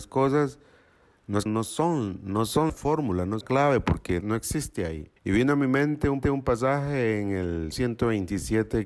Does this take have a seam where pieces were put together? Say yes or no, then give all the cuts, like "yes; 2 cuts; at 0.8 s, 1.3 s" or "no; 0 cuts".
yes; 7 cuts; at 1.5 s, 2.7 s, 3.4 s, 4.2 s, 5.2 s, 6.2 s, 7.7 s